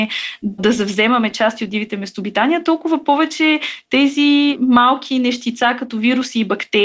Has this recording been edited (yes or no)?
no